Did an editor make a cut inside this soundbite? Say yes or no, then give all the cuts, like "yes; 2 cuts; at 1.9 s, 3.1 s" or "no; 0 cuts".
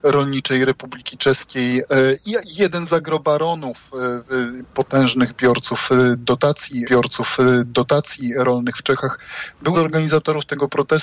yes; 2 cuts; at 6.8 s, 9.7 s